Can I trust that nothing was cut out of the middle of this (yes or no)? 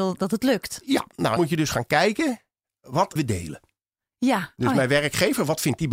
no